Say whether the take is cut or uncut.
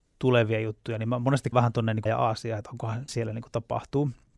cut